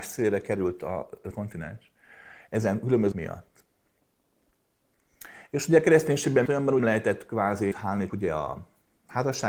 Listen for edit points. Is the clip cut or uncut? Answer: cut